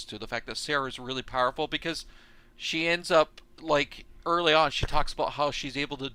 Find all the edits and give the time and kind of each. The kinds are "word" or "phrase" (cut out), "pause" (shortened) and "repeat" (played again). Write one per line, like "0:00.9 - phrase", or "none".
0:03.5 - pause